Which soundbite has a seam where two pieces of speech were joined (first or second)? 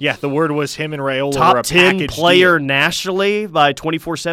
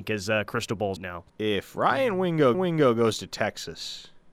second